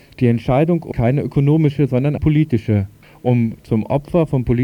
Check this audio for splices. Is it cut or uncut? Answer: cut